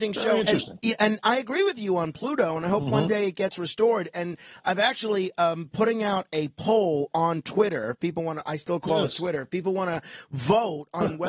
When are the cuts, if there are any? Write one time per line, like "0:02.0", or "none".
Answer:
none